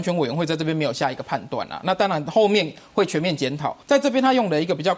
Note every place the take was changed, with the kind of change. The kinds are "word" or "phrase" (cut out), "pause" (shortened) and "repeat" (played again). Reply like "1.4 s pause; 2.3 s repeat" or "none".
3.8 s pause

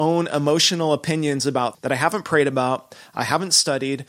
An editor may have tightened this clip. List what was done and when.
1.7 s word

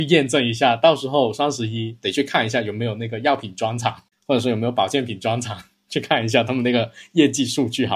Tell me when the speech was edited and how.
none

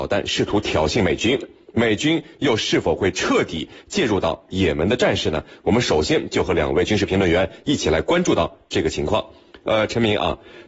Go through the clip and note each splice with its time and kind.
none

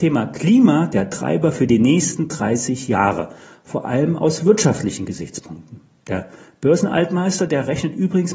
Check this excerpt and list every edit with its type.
none

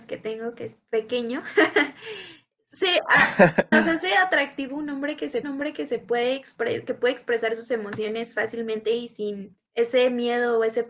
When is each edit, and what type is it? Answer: 3.7 s word; 5.4 s repeat; 9.7 s pause

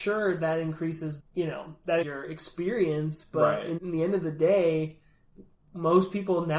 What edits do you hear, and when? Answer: 1.2 s word; 2.0 s word; 3.8 s word

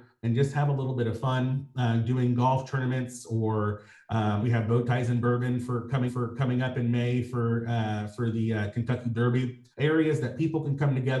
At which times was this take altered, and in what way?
4.4 s word; 6.1 s repeat; 9.7 s pause

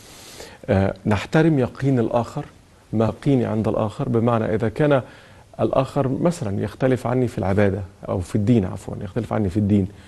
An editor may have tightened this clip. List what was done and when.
3.1 s word; 8.1 s word

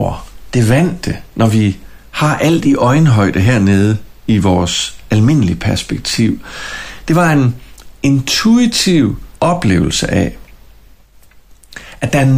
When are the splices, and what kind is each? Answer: 9.4 s pause

